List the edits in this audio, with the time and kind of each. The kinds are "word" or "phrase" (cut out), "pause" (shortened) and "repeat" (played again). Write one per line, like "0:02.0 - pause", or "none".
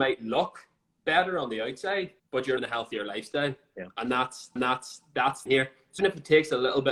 0:02.2 - pause
0:02.6 - phrase
0:04.6 - repeat
0:05.5 - phrase
0:06.0 - word